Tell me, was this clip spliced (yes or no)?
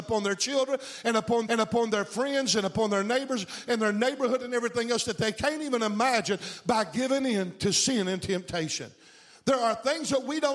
yes